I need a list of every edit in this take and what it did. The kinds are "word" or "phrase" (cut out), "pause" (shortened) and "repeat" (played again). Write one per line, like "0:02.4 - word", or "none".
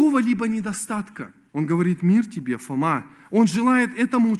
0:01.5 - pause